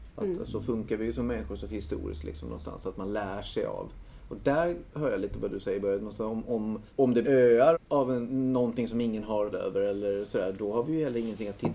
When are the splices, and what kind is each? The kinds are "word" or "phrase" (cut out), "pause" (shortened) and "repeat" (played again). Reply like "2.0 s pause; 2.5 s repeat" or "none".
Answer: 1.7 s phrase; 6.9 s pause; 7.2 s word; 7.7 s word; 9.5 s word